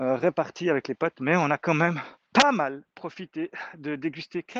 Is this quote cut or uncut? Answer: cut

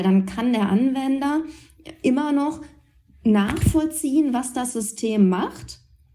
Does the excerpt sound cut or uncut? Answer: uncut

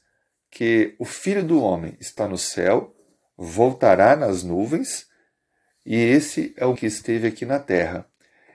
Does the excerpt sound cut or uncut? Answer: cut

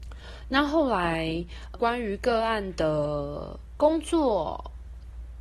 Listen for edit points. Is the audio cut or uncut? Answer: cut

